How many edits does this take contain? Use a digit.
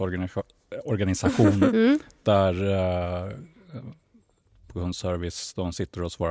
1